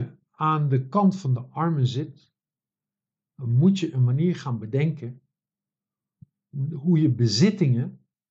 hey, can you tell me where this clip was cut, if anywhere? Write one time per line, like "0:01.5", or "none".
none